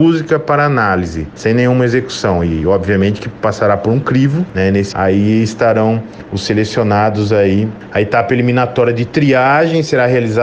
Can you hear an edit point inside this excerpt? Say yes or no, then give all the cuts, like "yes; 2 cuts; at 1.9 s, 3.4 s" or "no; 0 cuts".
yes; 1 cut; at 4.9 s